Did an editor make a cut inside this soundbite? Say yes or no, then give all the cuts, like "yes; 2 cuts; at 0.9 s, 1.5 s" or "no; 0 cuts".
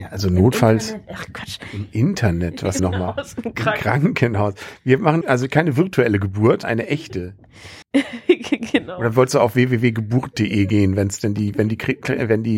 yes; 4 cuts; at 2.8 s, 5.2 s, 6.6 s, 7.8 s